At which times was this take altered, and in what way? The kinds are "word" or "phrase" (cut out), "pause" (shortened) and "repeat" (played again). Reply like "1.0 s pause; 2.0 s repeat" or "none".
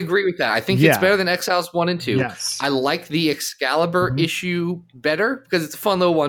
none